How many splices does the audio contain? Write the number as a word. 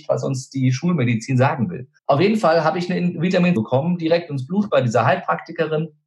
two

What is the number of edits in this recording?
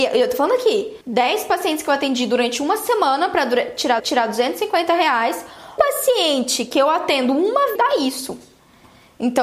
four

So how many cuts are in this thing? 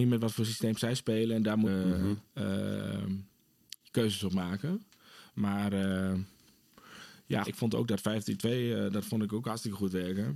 three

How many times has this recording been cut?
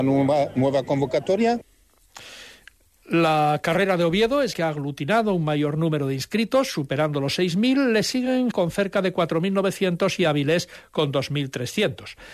two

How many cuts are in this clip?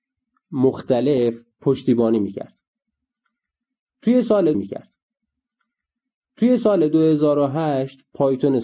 one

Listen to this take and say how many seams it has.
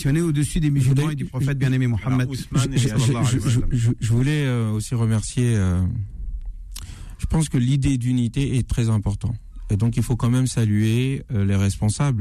zero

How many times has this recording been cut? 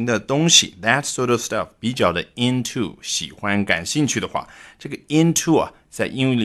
zero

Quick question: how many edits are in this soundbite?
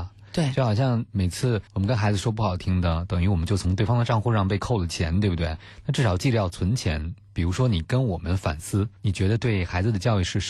two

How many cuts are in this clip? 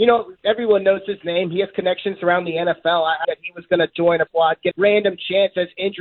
three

